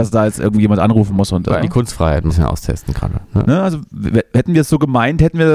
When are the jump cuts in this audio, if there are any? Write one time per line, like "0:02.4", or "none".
0:01.6
0:02.3